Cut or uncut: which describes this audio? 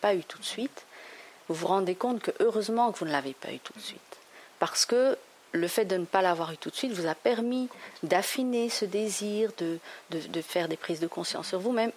uncut